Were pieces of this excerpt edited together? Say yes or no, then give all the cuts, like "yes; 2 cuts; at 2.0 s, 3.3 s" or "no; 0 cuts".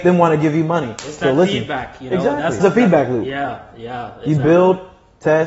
yes; 1 cut; at 2.6 s